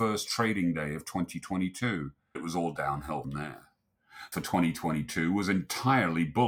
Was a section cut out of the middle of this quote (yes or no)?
yes